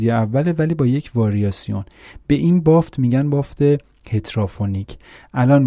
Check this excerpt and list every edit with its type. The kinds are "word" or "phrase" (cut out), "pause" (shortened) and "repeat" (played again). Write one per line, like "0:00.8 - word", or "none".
none